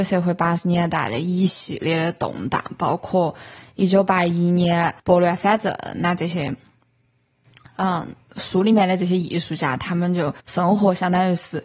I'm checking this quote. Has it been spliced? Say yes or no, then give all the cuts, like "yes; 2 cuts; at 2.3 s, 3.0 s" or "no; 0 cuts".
yes; 2 cuts; at 5.0 s, 10.4 s